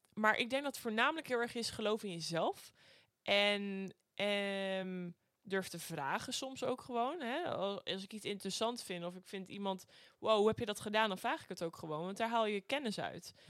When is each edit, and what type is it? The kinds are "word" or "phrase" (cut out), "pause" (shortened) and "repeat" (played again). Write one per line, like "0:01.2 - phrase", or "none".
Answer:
none